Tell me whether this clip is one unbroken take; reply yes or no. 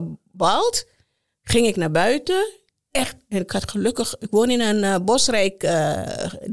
yes